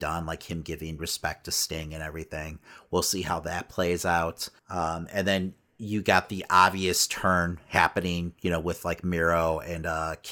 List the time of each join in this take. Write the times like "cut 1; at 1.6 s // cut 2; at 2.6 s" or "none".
cut 1; at 4.6 s